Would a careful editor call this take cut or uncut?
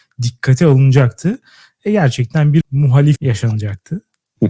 cut